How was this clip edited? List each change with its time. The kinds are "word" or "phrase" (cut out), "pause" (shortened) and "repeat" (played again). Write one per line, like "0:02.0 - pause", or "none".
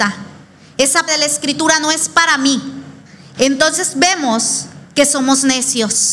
0:01.1 - word
0:03.1 - pause